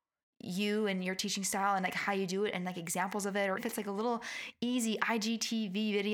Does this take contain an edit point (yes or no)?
yes